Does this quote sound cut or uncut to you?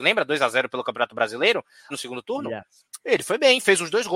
cut